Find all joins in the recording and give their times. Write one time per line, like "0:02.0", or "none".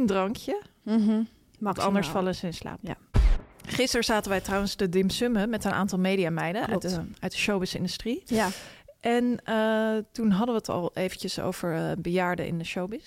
none